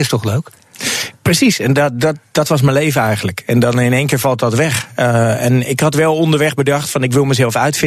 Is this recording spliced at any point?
yes; 1 cut; at 1.2 s

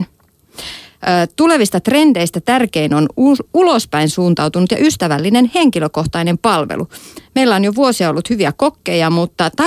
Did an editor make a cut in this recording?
no; 0 cuts

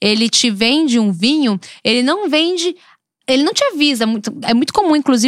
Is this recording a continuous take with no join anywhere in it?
yes; 0 cuts

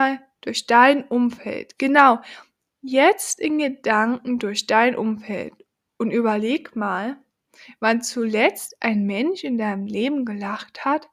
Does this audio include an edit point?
no; 0 cuts

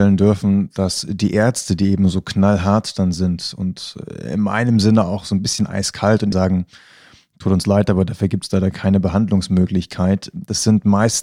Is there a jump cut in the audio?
yes; 1 cut; at 6.3 s

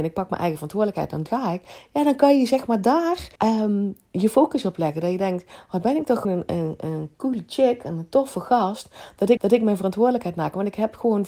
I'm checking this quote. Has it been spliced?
yes; 4 cuts; at 1.3 s, 3.4 s, 6.2 s, 9.4 s

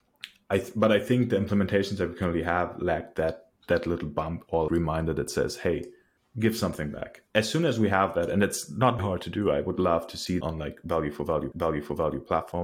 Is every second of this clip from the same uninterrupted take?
no; 7 cuts; at 3.6 s, 4.7 s, 6.2 s, 7.3 s, 9.0 s, 10.4 s, 11.5 s

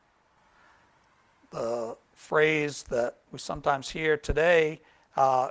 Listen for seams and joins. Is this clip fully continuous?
no; 2 cuts; at 2.0 s, 3.2 s

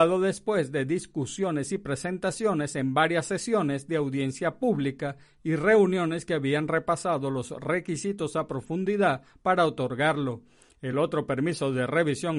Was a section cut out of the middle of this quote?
no; 0 cuts

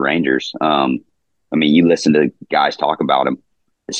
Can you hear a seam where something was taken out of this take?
no; 0 cuts

